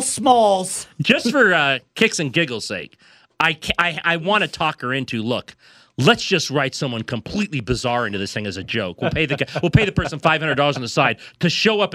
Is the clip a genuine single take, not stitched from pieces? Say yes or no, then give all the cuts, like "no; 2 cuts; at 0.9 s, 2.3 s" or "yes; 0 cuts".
yes; 0 cuts